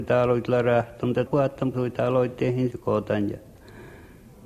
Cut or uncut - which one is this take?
cut